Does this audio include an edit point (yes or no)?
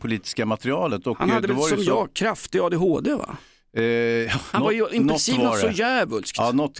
yes